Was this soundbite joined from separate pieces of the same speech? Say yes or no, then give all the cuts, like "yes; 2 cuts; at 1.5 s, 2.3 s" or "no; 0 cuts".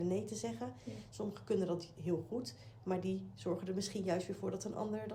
no; 0 cuts